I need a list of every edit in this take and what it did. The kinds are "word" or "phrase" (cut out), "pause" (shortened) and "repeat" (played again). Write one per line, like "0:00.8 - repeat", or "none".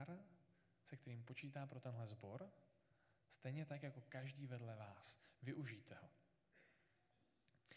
none